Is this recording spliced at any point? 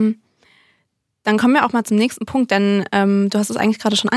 no; 0 cuts

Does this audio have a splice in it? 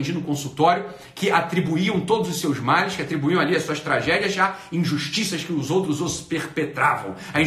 no; 0 cuts

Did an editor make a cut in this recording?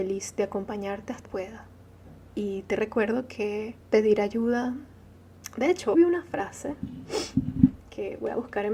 yes; 4 cuts; at 1.2 s, 2.3 s, 3.8 s, 5.9 s

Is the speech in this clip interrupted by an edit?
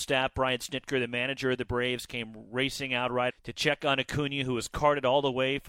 yes; 1 cut; at 3.3 s

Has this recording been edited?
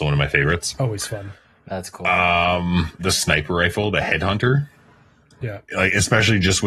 yes; 1 cut; at 3.0 s

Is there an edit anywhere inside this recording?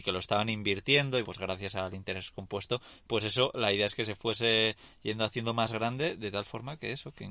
yes; 1 cut; at 1.2 s

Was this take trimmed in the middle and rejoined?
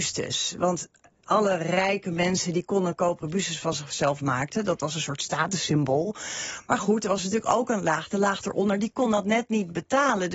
no; 0 cuts

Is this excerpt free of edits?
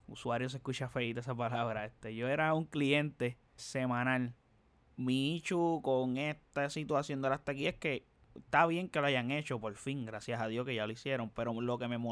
no; 1 cut; at 3.6 s

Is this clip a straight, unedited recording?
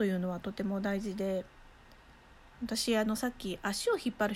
yes; 0 cuts

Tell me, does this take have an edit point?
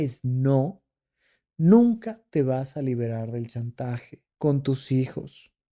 yes; 1 cut; at 4.3 s

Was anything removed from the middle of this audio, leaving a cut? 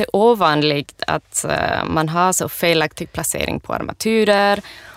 no; 0 cuts

